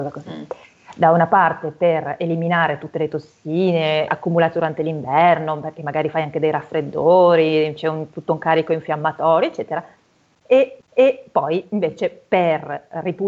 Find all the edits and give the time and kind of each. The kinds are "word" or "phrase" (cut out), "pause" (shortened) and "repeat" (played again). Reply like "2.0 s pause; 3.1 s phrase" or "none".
4.1 s word; 10.8 s repeat